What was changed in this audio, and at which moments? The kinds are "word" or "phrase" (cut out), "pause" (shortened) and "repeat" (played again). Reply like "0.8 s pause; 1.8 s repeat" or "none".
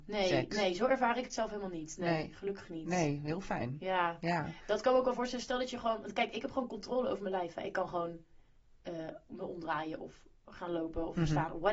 none